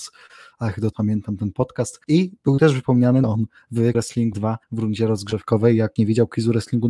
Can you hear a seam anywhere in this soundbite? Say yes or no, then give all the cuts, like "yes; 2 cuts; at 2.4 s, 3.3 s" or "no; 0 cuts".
yes; 7 cuts; at 0.9 s, 2.0 s, 3.2 s, 3.9 s, 4.3 s, 4.6 s, 6.0 s